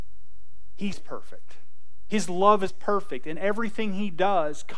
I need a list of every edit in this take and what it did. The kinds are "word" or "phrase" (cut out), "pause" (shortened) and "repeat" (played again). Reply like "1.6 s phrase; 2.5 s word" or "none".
0.9 s word; 2.7 s word